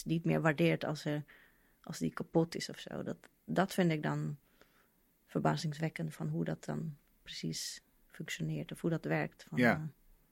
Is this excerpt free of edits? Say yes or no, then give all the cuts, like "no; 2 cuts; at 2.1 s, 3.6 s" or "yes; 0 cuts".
yes; 0 cuts